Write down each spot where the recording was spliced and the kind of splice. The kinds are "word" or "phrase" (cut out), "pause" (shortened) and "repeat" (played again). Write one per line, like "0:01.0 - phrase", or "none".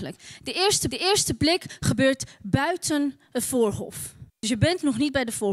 0:00.9 - repeat
0:04.3 - pause